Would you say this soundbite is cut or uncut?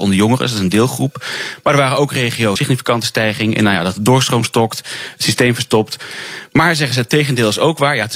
cut